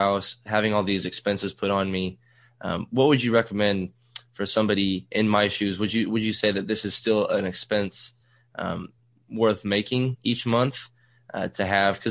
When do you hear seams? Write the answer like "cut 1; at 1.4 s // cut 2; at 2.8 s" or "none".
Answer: none